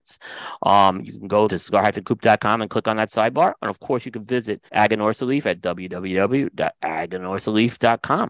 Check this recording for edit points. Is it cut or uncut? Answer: cut